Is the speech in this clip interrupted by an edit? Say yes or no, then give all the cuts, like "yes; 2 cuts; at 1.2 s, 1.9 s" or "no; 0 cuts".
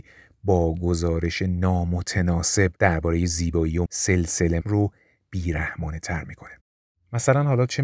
yes; 3 cuts; at 2.8 s, 3.9 s, 4.6 s